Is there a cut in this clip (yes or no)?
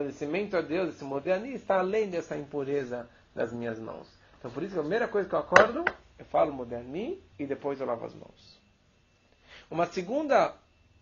yes